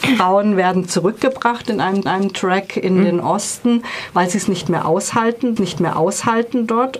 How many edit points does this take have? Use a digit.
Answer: 2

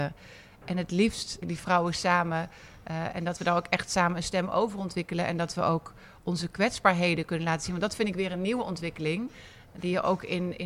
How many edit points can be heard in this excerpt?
1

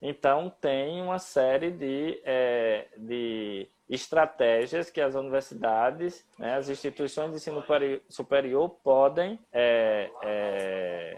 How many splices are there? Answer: 2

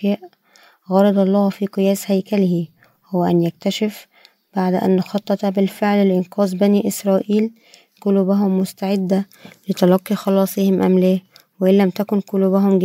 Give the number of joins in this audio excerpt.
1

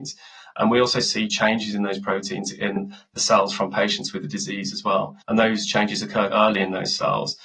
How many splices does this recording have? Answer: 2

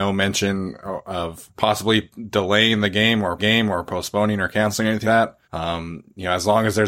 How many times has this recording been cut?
4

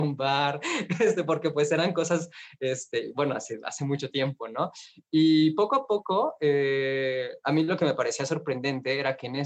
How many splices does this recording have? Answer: 0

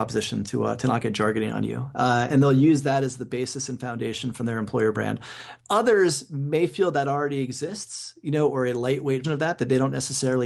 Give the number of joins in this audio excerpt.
3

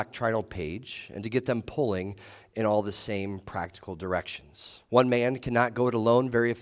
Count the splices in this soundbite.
1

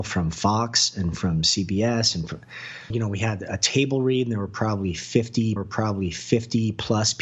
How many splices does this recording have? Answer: 2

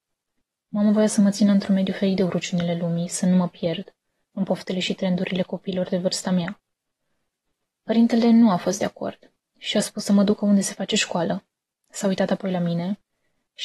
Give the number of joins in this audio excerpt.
0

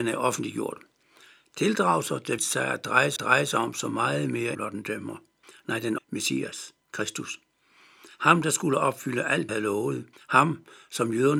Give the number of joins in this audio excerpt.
8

